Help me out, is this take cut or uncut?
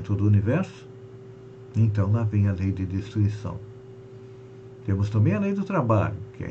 uncut